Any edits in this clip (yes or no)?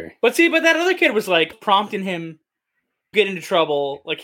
yes